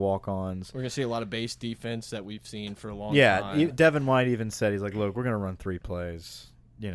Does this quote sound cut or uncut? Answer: uncut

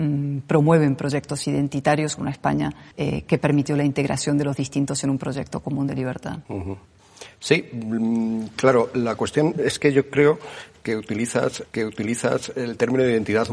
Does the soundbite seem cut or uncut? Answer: cut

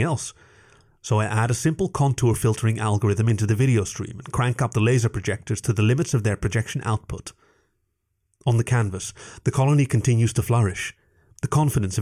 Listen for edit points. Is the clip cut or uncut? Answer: uncut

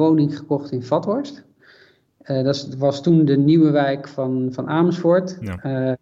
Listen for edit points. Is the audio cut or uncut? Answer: uncut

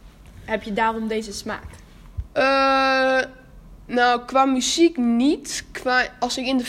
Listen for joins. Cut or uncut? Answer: uncut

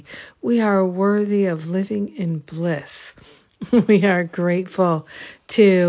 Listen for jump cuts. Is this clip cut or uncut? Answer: uncut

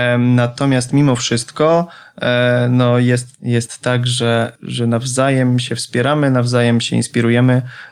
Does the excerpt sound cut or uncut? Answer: uncut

